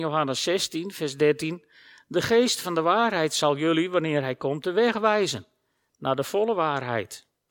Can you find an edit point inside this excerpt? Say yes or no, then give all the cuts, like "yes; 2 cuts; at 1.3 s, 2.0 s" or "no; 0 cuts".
no; 0 cuts